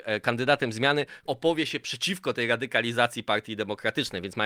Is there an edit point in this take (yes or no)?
yes